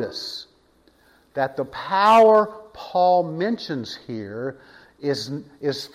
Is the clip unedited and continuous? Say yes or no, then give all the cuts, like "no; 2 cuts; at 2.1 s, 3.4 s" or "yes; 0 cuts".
yes; 0 cuts